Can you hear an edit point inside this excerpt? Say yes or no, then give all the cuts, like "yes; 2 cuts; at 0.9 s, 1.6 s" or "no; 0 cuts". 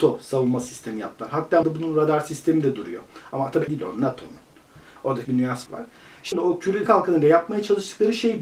yes; 6 cuts; at 1.6 s, 3.7 s, 5.2 s, 5.7 s, 6.3 s, 6.9 s